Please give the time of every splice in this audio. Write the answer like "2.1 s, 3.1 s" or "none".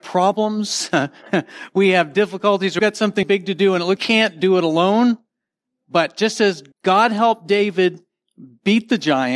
2.8 s, 3.2 s, 4.0 s, 6.7 s